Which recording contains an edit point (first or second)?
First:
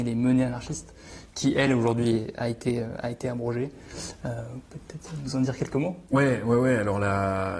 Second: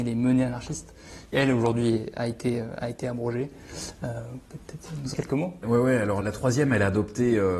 second